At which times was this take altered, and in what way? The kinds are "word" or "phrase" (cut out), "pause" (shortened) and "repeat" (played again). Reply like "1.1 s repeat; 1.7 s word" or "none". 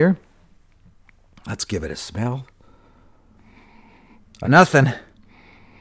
4.4 s word